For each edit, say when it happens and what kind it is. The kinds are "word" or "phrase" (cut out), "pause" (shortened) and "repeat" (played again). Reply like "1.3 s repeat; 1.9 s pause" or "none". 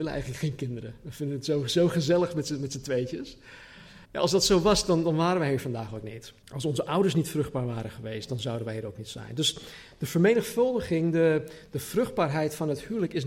4.0 s pause; 6.4 s pause